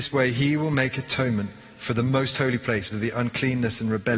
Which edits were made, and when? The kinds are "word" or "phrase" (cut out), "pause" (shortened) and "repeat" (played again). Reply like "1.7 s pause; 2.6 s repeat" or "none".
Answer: 2.9 s word